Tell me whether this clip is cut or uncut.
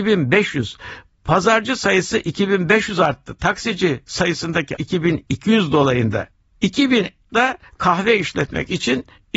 cut